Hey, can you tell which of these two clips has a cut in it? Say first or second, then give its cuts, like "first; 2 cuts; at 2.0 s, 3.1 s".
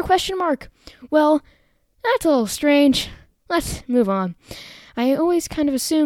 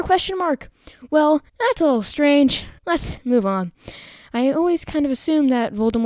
second; 2 cuts; at 1.5 s, 2.8 s